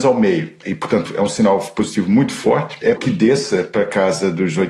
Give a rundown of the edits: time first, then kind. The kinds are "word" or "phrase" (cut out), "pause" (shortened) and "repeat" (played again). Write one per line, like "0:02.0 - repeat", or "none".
0:03.0 - word